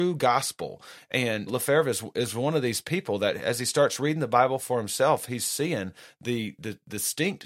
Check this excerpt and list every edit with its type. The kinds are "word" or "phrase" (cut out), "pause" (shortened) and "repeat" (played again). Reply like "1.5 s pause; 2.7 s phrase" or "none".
1.5 s word